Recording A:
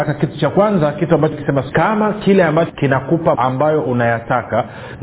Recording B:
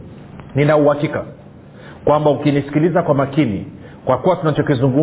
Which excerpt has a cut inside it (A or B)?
A